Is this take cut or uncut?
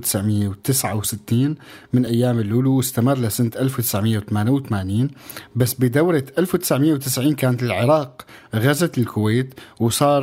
uncut